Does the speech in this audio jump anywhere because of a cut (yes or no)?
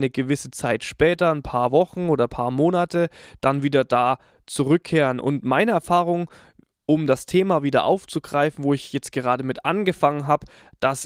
no